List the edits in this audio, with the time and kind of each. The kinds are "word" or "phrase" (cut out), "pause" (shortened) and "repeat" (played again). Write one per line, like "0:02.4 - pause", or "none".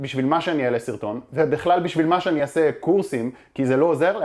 none